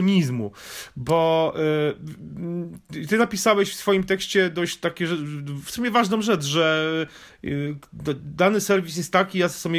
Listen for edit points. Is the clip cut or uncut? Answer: uncut